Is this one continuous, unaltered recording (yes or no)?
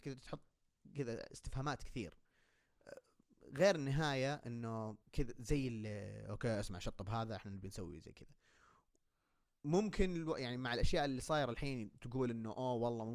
no